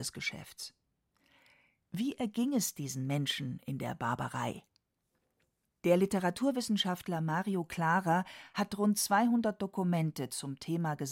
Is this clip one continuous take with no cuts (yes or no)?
yes